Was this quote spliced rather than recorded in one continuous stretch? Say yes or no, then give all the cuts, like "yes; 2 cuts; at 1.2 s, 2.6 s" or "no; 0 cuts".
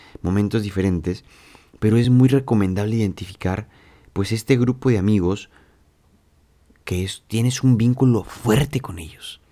no; 0 cuts